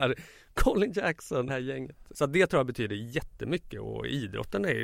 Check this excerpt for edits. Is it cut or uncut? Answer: cut